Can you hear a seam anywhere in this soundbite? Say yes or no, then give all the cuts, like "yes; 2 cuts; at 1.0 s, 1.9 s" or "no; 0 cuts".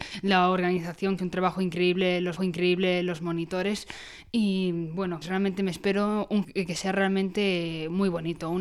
yes; 4 cuts; at 1.2 s, 2.4 s, 5.2 s, 6.4 s